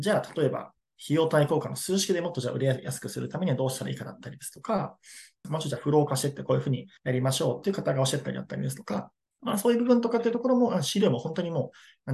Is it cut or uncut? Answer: cut